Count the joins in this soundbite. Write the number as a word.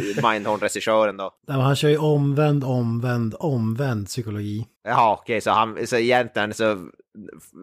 two